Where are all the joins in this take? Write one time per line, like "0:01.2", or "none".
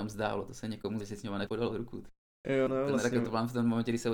0:01.0
0:01.5
0:02.7